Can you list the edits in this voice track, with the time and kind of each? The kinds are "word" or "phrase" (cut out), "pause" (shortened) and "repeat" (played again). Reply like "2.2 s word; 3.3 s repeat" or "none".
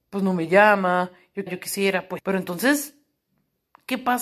1.5 s word; 2.2 s word